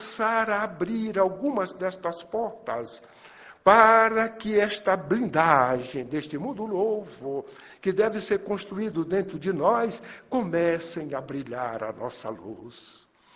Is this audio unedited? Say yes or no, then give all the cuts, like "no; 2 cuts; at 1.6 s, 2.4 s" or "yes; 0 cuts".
yes; 0 cuts